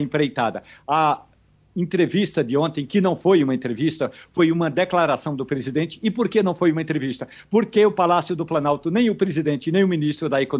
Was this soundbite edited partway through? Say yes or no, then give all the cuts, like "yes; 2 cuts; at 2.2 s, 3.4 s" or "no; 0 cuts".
no; 0 cuts